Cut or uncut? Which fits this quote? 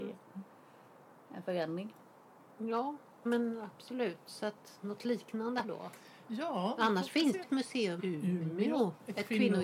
cut